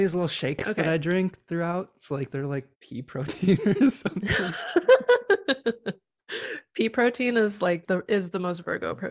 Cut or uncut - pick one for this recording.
cut